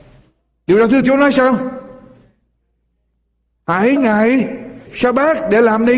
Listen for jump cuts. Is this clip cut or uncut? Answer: cut